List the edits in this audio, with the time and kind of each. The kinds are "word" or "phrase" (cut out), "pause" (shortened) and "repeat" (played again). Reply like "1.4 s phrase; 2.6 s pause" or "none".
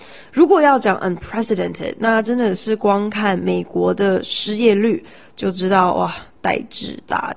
none